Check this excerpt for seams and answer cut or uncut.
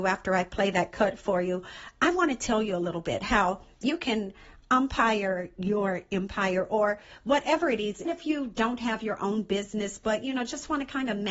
cut